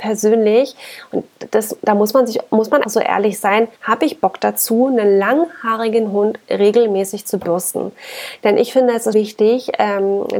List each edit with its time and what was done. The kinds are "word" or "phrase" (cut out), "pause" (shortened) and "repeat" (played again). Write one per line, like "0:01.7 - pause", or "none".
0:02.8 - word
0:03.7 - pause
0:09.1 - word